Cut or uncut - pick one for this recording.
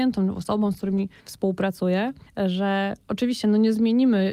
cut